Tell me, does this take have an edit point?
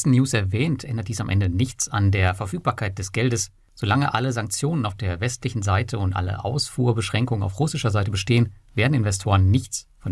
no; 0 cuts

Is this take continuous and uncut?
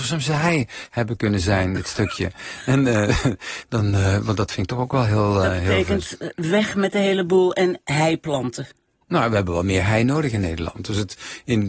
yes; 0 cuts

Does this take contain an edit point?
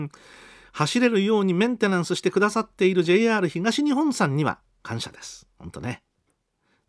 no; 0 cuts

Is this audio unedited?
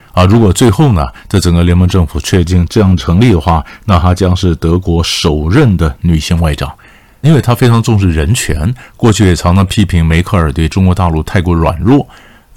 no; 1 cut; at 7.2 s

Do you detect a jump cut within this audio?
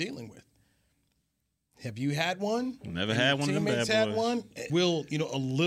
yes; 1 cut; at 4.7 s

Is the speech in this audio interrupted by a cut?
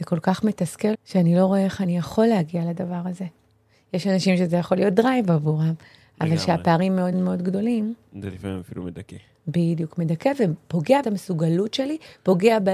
yes; 3 cuts; at 0.9 s, 7.1 s, 11.0 s

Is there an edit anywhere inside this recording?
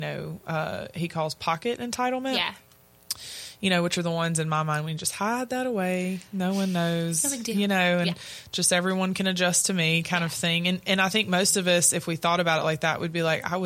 no; 0 cuts

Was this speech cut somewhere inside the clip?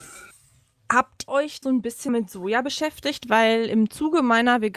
yes; 3 cuts; at 1.3 s, 1.6 s, 2.1 s

